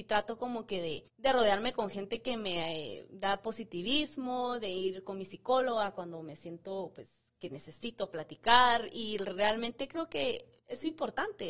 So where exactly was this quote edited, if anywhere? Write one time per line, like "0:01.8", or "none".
0:01.1
0:10.6